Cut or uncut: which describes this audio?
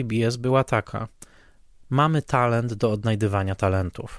uncut